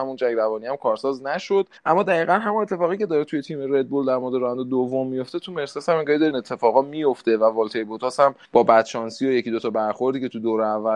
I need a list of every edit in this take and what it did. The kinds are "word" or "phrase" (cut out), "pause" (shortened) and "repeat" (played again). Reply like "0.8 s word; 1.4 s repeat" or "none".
1.8 s pause; 6.3 s word; 8.4 s pause